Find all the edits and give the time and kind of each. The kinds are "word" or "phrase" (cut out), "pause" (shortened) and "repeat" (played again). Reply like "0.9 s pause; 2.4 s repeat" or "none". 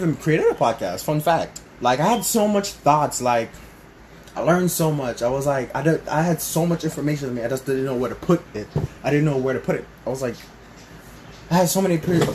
1.7 s pause